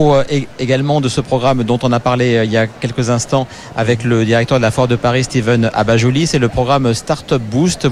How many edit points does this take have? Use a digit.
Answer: 0